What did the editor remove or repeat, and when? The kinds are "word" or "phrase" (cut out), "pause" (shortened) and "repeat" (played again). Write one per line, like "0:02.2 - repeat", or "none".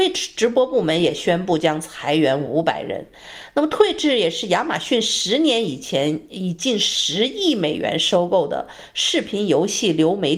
none